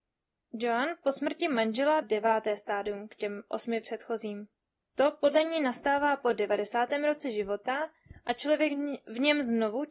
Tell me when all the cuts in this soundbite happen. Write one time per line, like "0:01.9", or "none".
0:02.0
0:04.6